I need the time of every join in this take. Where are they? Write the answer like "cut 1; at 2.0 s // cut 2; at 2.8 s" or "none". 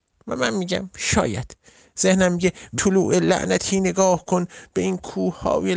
cut 1; at 2.8 s